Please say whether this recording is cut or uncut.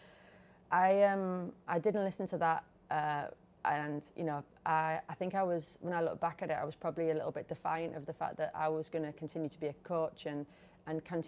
uncut